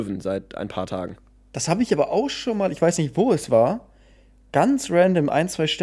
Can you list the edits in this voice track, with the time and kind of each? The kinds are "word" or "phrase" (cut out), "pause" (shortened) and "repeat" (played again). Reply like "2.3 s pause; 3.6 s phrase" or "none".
none